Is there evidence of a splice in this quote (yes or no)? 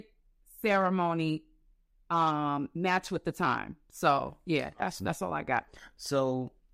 no